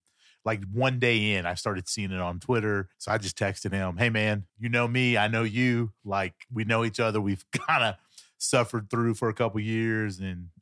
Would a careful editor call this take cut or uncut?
cut